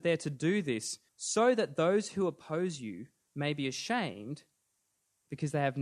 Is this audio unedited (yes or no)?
no